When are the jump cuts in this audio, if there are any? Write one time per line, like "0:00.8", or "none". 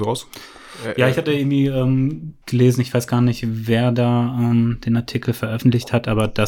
0:02.4